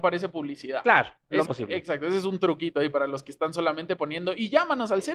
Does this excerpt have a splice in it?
yes; 1 cut; at 1.4 s

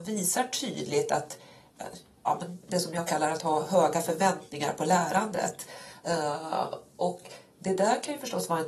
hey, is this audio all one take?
yes; 0 cuts

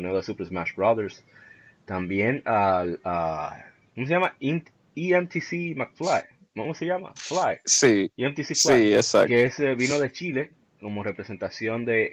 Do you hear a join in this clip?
no; 0 cuts

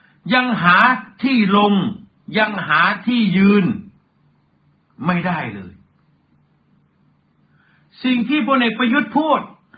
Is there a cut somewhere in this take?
no; 0 cuts

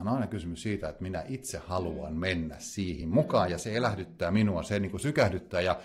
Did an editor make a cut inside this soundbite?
no; 0 cuts

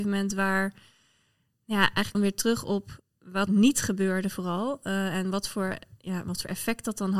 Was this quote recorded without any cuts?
no; 2 cuts; at 2.1 s, 3.5 s

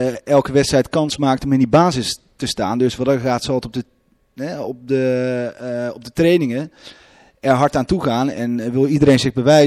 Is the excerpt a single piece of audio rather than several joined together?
yes; 0 cuts

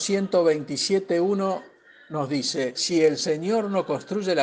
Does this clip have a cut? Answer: no; 0 cuts

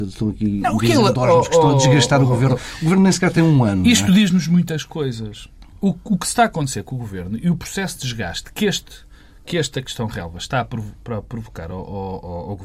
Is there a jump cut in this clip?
no; 0 cuts

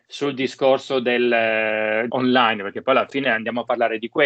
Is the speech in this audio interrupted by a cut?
yes; 1 cut; at 2.1 s

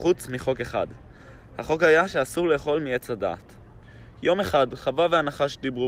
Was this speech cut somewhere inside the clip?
no; 0 cuts

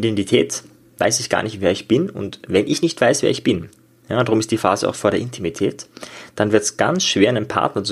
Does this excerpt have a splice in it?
no; 0 cuts

